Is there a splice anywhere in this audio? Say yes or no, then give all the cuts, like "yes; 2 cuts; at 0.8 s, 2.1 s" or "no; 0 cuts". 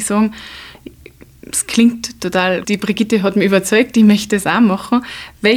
yes; 1 cut; at 2.6 s